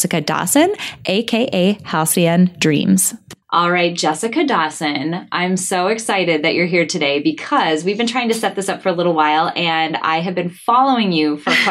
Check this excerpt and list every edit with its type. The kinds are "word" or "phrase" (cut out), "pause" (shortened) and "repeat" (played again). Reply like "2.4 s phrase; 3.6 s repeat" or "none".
3.4 s pause